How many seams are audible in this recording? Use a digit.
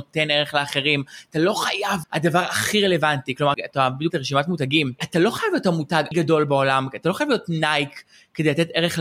4